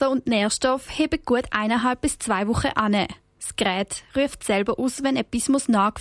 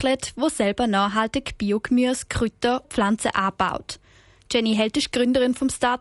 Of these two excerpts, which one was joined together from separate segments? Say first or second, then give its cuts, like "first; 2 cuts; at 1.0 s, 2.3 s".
second; 1 cut; at 2.8 s